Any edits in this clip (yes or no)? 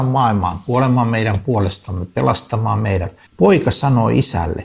yes